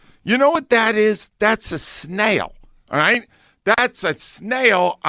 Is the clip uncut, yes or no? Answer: yes